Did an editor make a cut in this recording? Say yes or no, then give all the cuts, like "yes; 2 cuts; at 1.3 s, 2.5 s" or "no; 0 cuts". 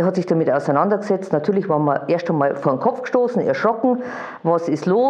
no; 0 cuts